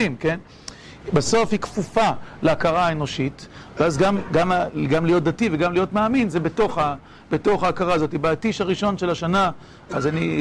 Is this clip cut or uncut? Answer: uncut